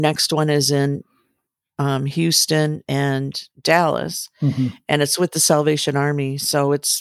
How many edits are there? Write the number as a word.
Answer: zero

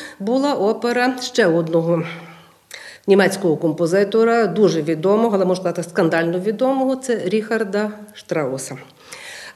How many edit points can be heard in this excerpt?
one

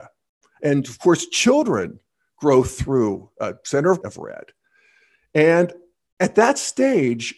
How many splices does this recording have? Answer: one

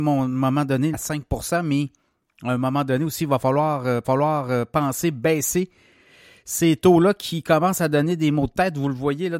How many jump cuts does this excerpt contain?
two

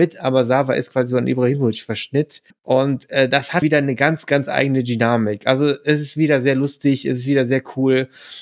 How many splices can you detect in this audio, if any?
two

